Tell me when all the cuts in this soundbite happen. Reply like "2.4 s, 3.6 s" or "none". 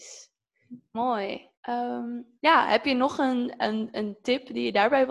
1.6 s